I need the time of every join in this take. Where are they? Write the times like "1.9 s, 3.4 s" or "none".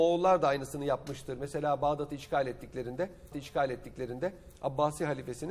3.3 s

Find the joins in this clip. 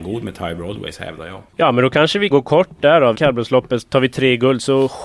1.5 s, 2.3 s, 3.1 s

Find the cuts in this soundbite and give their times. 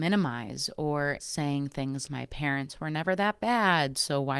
1.2 s, 2.1 s

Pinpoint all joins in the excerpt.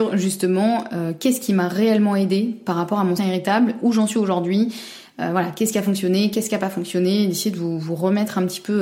3.2 s

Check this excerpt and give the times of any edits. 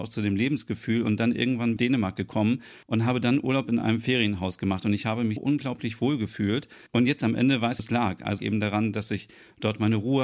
1.8 s, 2.8 s, 5.4 s, 6.9 s, 7.8 s, 8.4 s

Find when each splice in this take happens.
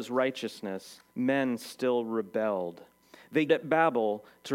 1.1 s, 3.5 s

